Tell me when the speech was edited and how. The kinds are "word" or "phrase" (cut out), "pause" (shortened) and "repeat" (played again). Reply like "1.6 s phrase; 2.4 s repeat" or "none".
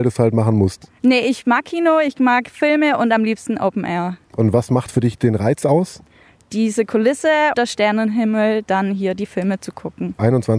7.5 s word